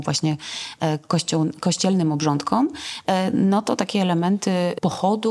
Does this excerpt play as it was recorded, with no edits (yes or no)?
yes